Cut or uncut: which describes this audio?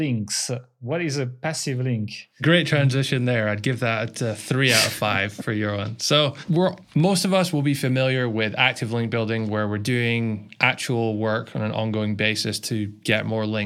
uncut